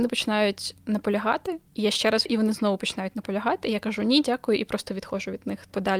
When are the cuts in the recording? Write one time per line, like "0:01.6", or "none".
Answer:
0:02.3